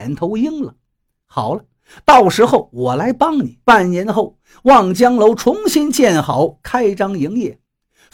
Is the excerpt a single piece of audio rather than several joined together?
no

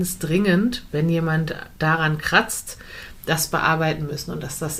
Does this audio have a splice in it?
no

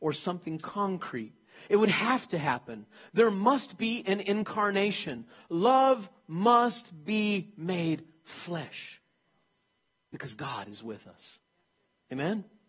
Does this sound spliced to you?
no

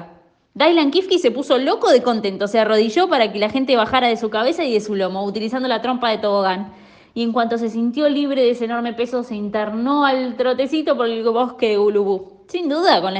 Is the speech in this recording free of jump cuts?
yes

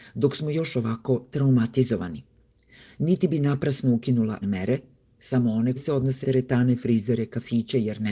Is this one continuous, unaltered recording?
no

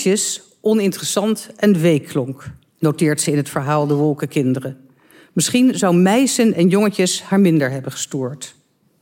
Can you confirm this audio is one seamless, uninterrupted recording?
yes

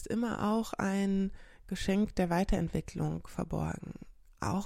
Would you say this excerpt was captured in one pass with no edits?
yes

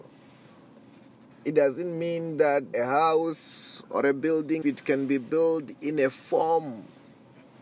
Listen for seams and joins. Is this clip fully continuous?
no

